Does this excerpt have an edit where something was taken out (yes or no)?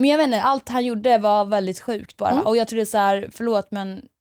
no